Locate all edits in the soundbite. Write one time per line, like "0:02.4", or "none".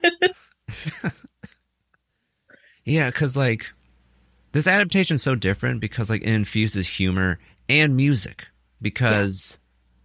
none